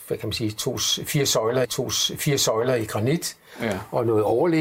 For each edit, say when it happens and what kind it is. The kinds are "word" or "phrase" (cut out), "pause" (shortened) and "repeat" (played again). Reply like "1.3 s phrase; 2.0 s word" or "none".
1.6 s repeat